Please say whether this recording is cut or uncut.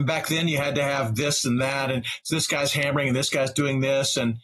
uncut